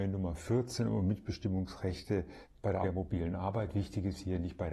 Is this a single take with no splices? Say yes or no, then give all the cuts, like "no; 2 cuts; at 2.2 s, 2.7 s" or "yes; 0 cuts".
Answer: no; 1 cut; at 2.8 s